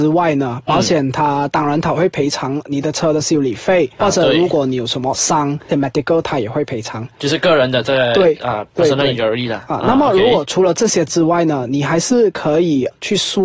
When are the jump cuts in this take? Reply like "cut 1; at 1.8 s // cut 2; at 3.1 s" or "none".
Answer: cut 1; at 4.0 s // cut 2; at 5.7 s